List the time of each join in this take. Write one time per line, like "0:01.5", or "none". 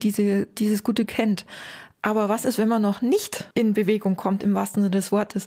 0:01.1
0:03.5